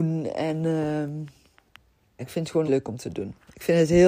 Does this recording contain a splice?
yes; 2 cuts; at 2.2 s, 2.7 s

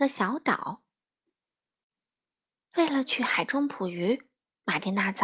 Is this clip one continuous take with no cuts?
yes; 0 cuts

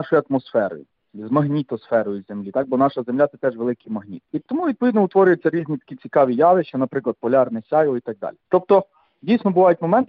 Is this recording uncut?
yes; 0 cuts

